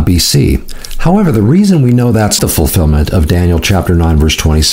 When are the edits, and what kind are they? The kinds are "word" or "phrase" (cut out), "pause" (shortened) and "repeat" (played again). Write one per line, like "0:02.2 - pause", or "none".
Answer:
0:02.4 - word